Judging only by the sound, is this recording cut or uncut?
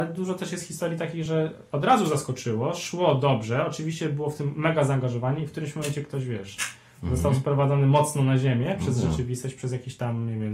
uncut